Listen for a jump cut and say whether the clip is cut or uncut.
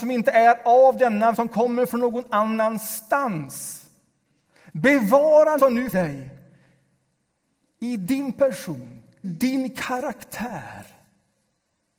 cut